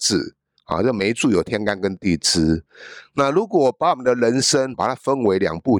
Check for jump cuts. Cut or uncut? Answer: cut